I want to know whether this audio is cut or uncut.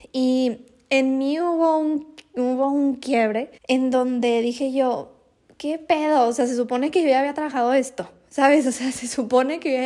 cut